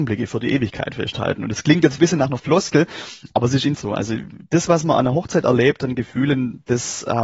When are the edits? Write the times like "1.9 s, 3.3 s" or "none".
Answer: 2.0 s, 3.7 s

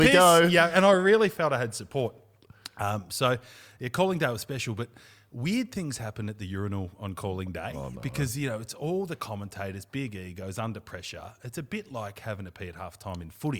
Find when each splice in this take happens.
none

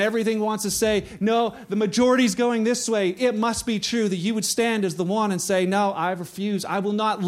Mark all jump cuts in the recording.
none

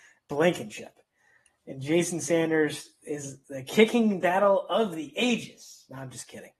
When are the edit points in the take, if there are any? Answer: none

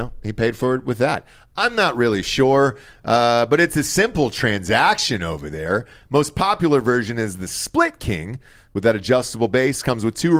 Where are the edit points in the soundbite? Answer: none

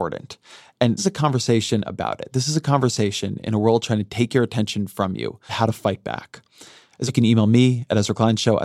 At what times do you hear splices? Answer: 1.0 s, 5.5 s, 7.1 s

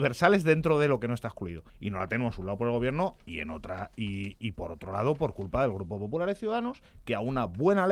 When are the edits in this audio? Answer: 1.7 s

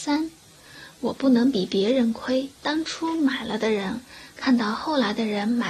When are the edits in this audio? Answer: 2.6 s

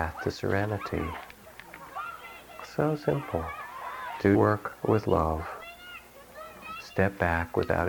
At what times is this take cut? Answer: 4.3 s

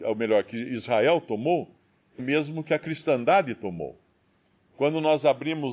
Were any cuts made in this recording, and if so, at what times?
2.2 s

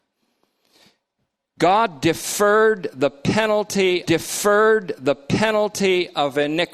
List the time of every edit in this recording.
4.0 s

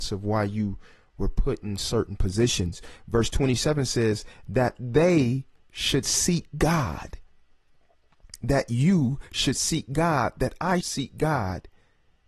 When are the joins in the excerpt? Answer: 10.8 s

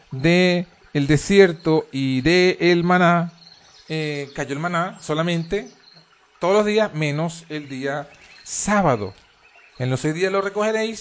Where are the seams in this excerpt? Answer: none

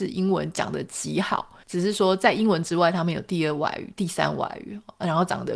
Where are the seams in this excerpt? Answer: 1.6 s

